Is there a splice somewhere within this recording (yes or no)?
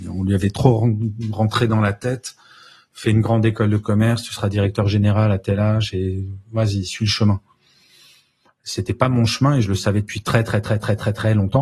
no